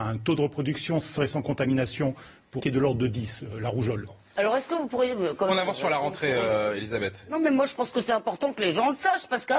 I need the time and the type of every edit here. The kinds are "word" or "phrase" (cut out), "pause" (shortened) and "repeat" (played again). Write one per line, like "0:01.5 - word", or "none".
0:01.2 - word
0:02.6 - word